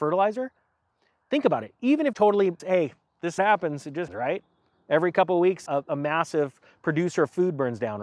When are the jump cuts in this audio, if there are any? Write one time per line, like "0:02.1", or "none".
0:02.1
0:02.6
0:03.4
0:04.1
0:05.7